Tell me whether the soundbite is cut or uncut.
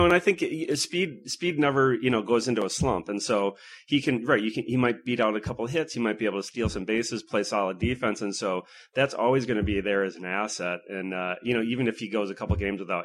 uncut